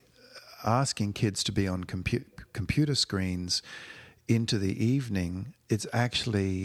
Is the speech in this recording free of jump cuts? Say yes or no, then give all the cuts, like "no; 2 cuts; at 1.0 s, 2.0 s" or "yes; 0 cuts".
yes; 0 cuts